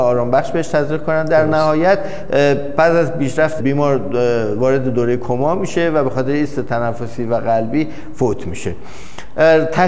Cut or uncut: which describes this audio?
cut